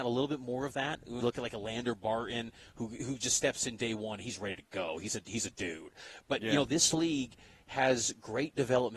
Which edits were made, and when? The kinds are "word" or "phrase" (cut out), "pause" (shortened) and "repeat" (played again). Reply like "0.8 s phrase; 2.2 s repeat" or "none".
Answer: 1.2 s word